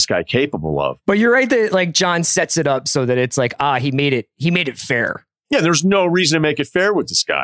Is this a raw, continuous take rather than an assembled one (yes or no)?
yes